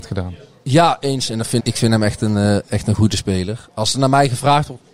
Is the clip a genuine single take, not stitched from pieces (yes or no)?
no